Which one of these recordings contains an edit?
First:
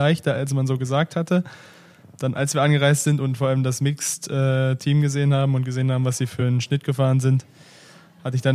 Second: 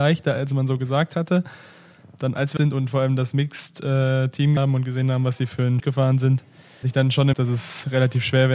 second; 5 cuts; at 2.6 s, 4.6 s, 5.8 s, 6.8 s, 7.3 s

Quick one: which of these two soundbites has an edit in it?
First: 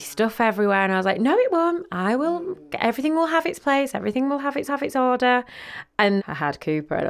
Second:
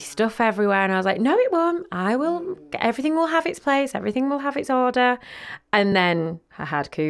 first; 2 cuts; at 4.7 s, 6.2 s

